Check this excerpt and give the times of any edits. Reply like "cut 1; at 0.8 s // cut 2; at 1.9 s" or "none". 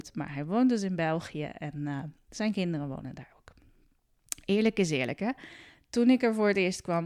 none